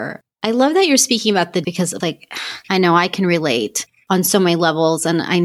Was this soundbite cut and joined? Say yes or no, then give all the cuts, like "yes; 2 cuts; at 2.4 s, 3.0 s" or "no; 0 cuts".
yes; 3 cuts; at 1.6 s, 2.0 s, 2.6 s